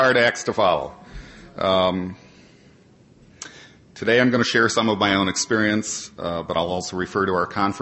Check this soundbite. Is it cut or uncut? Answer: uncut